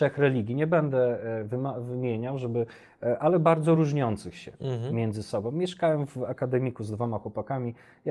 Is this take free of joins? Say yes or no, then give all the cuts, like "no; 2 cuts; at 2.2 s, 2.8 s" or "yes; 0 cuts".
yes; 0 cuts